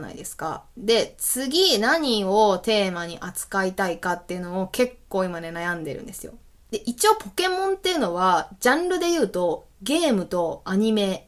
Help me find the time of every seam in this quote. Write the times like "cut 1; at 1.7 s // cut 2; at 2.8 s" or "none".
cut 1; at 6.6 s